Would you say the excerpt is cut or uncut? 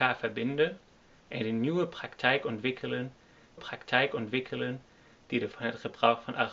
cut